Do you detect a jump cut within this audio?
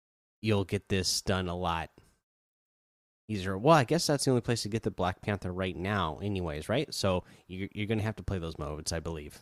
no; 0 cuts

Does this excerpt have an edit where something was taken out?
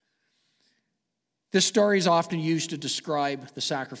no; 0 cuts

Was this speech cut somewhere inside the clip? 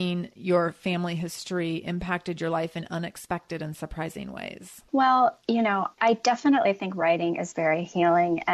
yes; 2 cuts; at 4.9 s, 5.9 s

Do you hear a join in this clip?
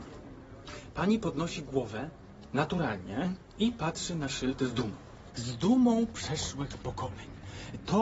no; 0 cuts

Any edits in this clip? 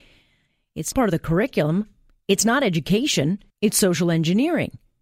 yes; 2 cuts; at 0.9 s, 3.5 s

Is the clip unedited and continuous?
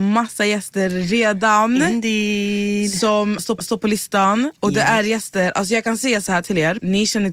no; 1 cut; at 3.6 s

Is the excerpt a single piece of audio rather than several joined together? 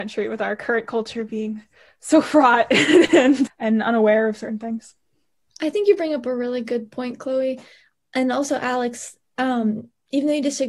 no; 1 cut; at 3.5 s

